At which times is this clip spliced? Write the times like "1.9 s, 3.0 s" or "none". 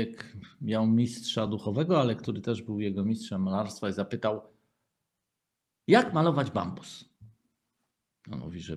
none